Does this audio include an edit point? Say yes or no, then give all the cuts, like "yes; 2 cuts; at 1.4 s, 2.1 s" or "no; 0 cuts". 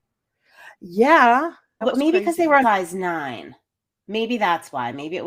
yes; 2 cuts; at 1.8 s, 2.6 s